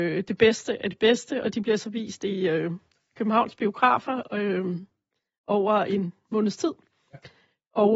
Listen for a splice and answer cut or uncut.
uncut